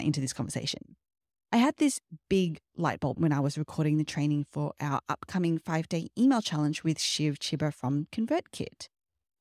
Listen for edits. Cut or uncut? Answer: cut